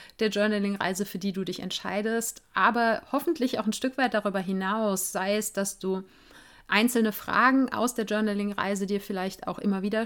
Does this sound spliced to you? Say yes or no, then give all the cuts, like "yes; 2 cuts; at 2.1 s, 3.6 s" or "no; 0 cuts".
no; 0 cuts